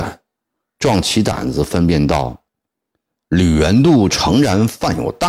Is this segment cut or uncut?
cut